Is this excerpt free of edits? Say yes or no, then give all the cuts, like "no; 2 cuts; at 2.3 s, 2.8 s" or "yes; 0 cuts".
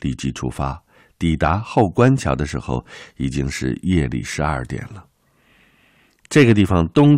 yes; 0 cuts